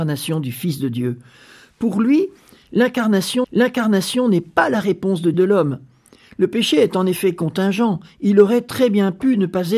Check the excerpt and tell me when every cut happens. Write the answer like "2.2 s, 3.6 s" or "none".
3.4 s, 5.3 s